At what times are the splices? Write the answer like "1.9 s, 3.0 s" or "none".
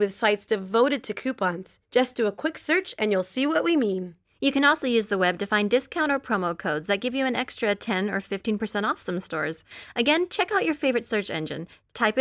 1.8 s, 4.2 s